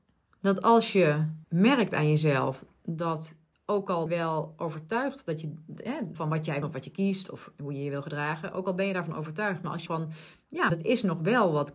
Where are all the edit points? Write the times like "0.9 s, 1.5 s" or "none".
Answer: 1.4 s, 3.5 s, 4.1 s, 6.1 s, 6.6 s, 9.9 s, 10.7 s